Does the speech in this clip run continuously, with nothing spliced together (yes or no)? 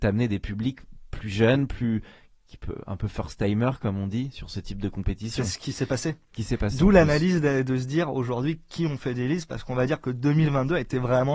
no